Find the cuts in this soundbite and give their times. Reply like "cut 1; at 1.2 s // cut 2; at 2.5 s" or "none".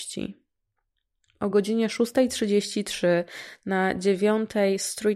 none